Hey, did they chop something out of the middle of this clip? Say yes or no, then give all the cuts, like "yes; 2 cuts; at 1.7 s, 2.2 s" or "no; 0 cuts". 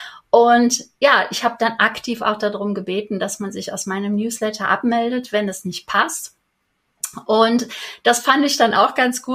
no; 0 cuts